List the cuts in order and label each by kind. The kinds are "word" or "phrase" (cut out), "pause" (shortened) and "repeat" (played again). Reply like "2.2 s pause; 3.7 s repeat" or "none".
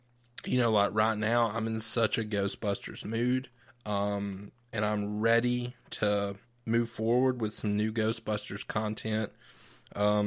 3.6 s pause; 6.4 s pause